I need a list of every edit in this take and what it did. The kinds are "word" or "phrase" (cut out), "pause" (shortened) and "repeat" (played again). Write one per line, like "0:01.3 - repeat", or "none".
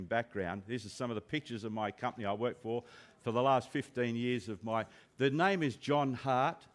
none